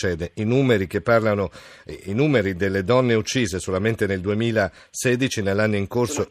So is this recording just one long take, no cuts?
yes; 0 cuts

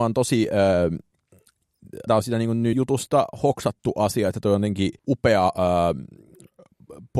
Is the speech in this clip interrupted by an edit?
yes; 3 cuts; at 2.1 s, 2.7 s, 5.0 s

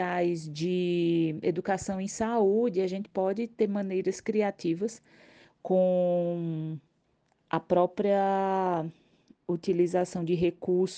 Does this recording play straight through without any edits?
yes; 0 cuts

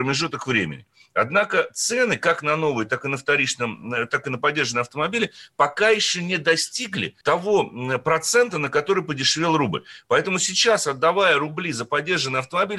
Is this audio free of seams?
no; 1 cut; at 7.2 s

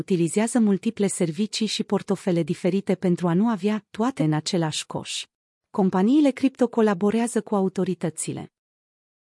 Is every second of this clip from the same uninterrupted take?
no; 2 cuts; at 4.2 s, 5.4 s

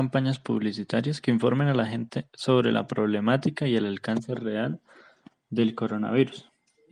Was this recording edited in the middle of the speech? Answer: no; 0 cuts

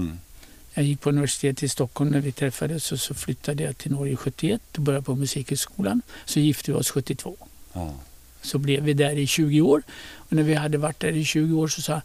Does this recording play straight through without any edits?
yes; 0 cuts

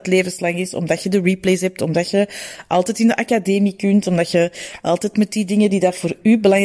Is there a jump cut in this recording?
no; 0 cuts

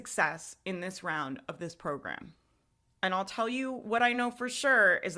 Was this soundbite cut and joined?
no; 0 cuts

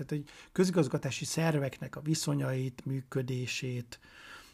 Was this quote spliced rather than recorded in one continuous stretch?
no; 0 cuts

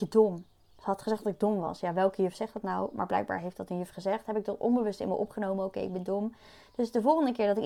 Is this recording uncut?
yes; 0 cuts

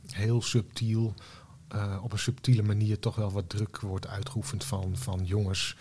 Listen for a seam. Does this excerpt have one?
no; 0 cuts

